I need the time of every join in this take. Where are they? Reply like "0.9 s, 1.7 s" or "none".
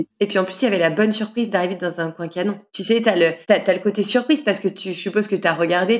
2.7 s, 3.4 s